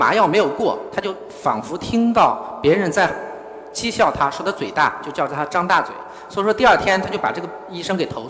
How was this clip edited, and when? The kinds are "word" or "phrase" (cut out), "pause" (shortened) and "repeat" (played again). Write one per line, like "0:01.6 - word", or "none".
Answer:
none